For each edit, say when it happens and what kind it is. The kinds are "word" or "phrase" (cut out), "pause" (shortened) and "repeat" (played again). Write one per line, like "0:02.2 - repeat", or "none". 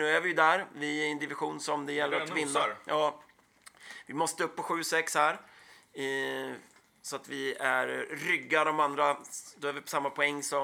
none